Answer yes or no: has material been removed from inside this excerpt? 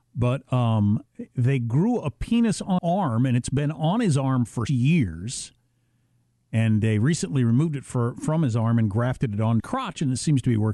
yes